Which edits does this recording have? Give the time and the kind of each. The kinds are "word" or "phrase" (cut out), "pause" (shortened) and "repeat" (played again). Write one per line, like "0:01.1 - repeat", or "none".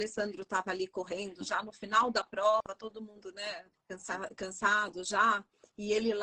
0:03.7 - pause